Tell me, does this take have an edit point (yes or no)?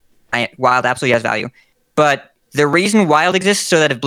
yes